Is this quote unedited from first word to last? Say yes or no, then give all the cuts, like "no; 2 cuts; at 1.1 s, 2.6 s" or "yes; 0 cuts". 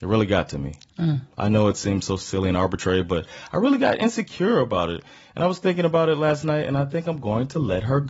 yes; 0 cuts